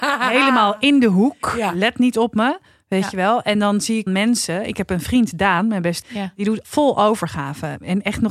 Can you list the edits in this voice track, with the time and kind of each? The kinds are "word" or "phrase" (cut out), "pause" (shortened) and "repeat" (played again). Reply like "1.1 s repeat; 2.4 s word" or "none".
4.1 s word; 6.0 s word; 6.6 s word